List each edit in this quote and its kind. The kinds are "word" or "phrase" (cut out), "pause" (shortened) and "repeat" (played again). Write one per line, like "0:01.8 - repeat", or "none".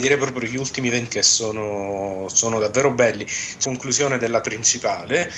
0:01.1 - word
0:03.6 - phrase
0:04.4 - word